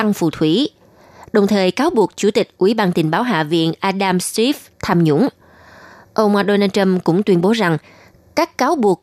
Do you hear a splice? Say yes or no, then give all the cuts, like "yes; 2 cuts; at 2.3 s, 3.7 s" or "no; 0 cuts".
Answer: no; 0 cuts